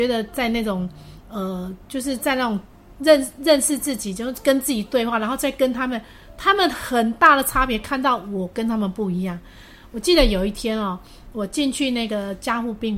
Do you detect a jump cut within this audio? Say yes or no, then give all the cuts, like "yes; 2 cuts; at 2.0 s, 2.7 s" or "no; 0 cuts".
no; 0 cuts